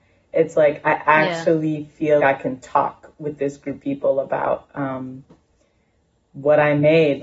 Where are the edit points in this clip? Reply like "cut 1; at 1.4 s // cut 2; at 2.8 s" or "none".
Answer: cut 1; at 2.2 s // cut 2; at 3.8 s